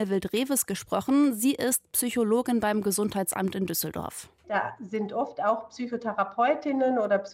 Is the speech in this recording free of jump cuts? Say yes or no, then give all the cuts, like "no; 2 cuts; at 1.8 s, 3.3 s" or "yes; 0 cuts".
yes; 0 cuts